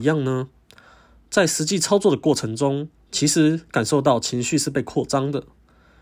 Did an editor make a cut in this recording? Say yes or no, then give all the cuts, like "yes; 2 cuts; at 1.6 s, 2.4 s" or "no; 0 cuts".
yes; 1 cut; at 2.9 s